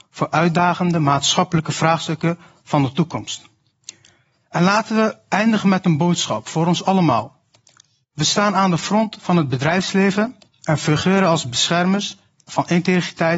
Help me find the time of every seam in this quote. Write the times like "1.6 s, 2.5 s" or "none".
none

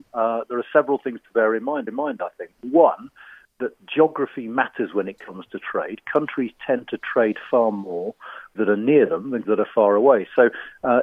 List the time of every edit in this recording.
1.9 s, 8.5 s, 9.4 s

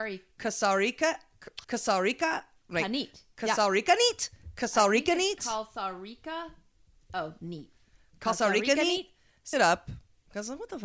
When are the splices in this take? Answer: 1.6 s, 9.5 s

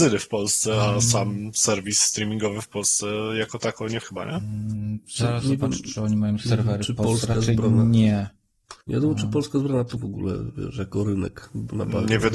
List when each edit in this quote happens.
4.0 s, 8.8 s, 10.0 s

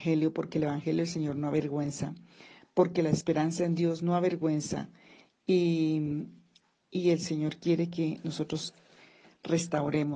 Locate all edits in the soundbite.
none

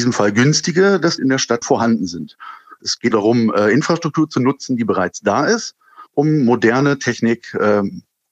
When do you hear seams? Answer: 1.2 s, 1.6 s, 3.1 s, 6.1 s

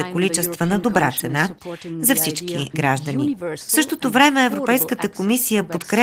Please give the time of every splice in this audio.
2.7 s

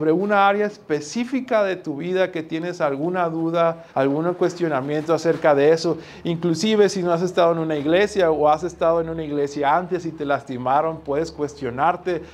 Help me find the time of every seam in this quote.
3.9 s

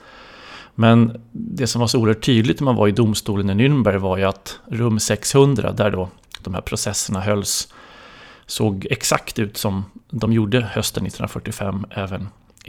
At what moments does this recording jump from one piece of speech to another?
none

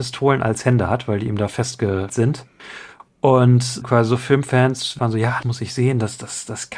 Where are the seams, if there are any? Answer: 2.1 s, 3.8 s, 5.0 s, 5.4 s

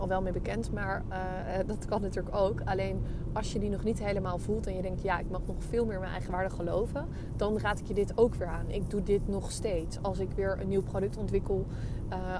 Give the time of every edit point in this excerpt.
none

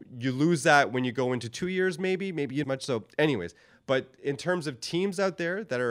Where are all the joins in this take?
2.6 s

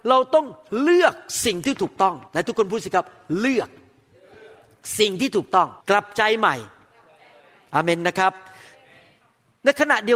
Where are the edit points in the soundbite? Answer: 2.3 s, 5.8 s

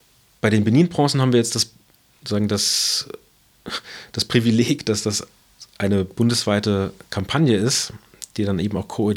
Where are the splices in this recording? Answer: none

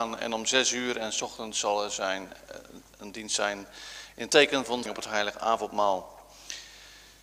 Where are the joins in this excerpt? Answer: 4.9 s

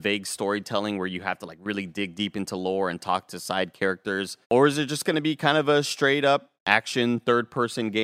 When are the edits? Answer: 4.4 s, 6.6 s

